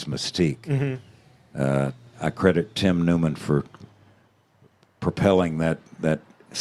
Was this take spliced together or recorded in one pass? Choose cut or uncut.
uncut